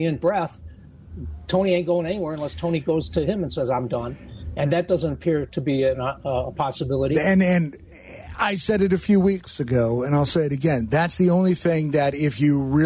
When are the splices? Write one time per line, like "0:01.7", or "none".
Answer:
none